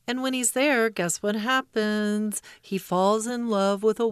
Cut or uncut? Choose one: uncut